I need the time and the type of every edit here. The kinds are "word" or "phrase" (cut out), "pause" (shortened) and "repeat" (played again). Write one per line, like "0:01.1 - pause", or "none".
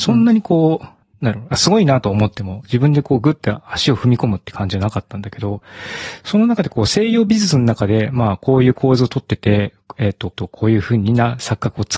0:01.0 - pause
0:10.3 - repeat